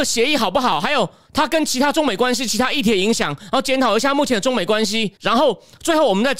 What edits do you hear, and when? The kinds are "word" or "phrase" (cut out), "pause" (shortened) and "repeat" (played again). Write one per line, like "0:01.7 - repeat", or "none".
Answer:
0:05.2 - pause